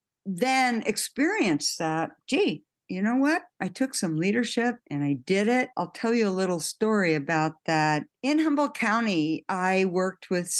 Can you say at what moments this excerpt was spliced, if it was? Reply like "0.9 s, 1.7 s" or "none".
4.8 s, 5.7 s, 8.2 s